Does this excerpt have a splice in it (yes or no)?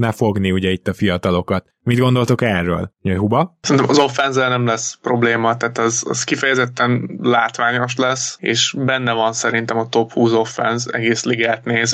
no